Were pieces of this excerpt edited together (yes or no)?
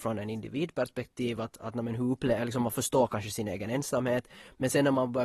no